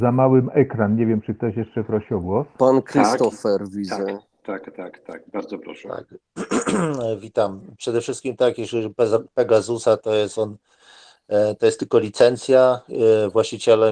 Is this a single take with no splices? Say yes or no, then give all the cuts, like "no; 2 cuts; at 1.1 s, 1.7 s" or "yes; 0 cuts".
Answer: yes; 0 cuts